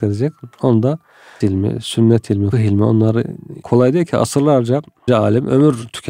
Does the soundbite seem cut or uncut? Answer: cut